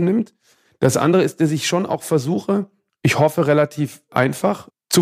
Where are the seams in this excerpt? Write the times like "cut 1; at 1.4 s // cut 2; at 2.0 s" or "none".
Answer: none